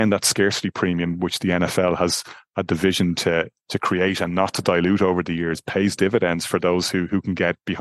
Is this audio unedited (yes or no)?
no